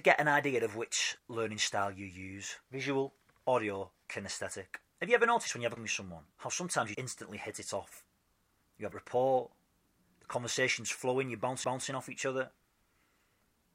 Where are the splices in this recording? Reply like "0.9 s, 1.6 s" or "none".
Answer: 2.6 s, 4.9 s, 5.8 s, 6.3 s, 6.9 s, 8.2 s, 8.9 s, 11.6 s